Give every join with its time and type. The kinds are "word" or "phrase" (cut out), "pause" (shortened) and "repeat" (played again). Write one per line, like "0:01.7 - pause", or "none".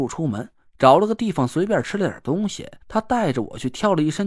0:02.8 - pause